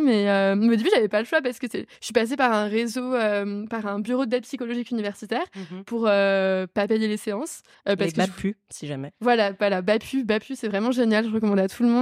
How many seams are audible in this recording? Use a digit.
2